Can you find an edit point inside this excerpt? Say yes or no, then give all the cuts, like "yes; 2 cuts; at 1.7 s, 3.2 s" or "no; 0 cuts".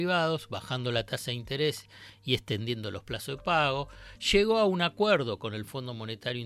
no; 0 cuts